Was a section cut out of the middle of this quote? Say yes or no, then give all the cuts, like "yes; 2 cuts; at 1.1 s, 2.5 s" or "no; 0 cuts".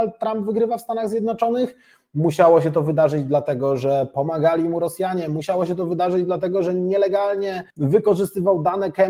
yes; 1 cut; at 7.7 s